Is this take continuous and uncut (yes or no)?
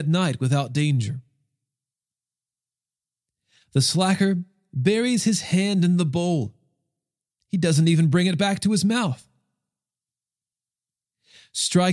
yes